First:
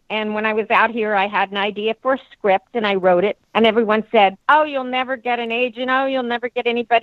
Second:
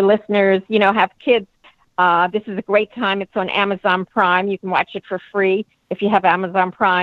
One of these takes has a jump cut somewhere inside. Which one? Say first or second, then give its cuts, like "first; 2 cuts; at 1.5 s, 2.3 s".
first; 2 cuts; at 3.4 s, 4.4 s